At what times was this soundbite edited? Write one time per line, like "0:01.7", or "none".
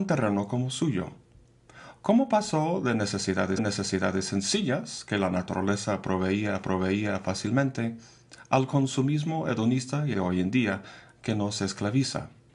0:03.6
0:06.6
0:10.1